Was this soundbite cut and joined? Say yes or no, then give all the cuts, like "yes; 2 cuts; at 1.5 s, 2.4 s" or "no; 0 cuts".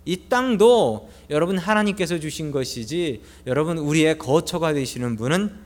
no; 0 cuts